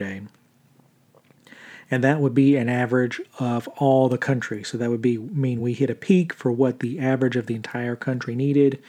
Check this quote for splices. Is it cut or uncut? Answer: uncut